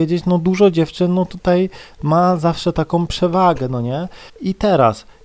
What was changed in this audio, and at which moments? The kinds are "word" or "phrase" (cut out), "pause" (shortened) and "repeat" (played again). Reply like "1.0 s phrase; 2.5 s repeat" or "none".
4.3 s pause